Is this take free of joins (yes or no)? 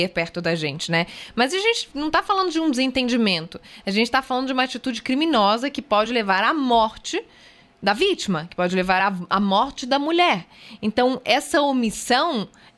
yes